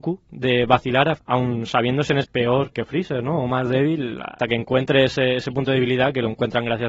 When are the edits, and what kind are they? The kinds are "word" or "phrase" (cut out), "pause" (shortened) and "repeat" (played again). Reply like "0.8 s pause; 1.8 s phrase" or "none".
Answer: 1.2 s word; 2.2 s word; 2.7 s word; 4.4 s word